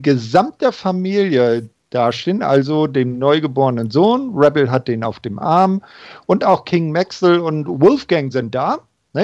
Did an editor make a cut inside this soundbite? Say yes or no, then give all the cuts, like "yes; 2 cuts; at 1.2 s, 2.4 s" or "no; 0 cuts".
no; 0 cuts